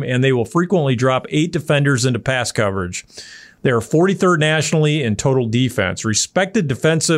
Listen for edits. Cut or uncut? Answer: uncut